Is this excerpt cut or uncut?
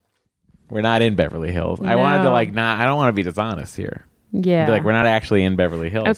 uncut